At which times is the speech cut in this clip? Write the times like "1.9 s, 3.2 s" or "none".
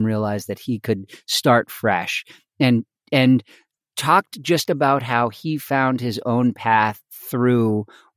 none